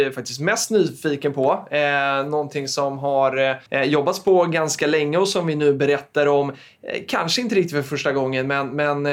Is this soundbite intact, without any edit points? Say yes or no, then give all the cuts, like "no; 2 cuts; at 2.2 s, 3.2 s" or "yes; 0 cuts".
no; 1 cut; at 3.7 s